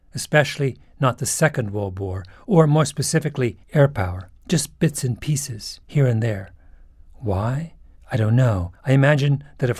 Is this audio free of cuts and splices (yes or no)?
no